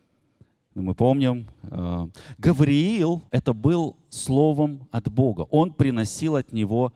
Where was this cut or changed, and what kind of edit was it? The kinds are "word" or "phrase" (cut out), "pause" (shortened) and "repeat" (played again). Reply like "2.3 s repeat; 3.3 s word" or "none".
3.3 s pause